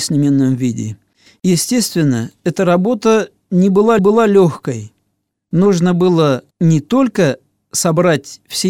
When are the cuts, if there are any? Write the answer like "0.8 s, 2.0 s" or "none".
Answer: 4.0 s, 6.5 s